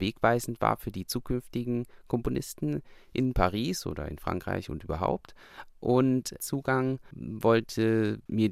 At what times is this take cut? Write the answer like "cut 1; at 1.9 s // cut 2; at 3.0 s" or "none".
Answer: cut 1; at 6.4 s